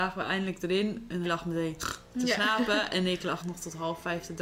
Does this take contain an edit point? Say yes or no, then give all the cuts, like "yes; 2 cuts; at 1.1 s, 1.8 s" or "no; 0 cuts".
yes; 2 cuts; at 1.2 s, 3.4 s